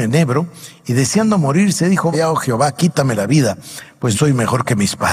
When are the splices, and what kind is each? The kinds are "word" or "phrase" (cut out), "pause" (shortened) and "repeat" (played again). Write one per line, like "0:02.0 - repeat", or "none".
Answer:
0:02.1 - word
0:04.1 - word